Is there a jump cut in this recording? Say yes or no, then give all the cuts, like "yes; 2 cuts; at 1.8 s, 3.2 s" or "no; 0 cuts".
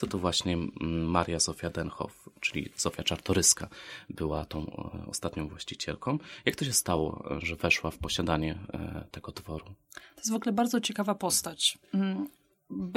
no; 0 cuts